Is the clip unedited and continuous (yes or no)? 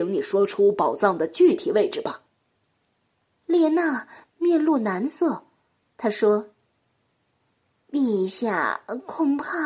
yes